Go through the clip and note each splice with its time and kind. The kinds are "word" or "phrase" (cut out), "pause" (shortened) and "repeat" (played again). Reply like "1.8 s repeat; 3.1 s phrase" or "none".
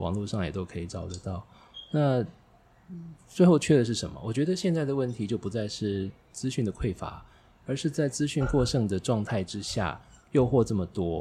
none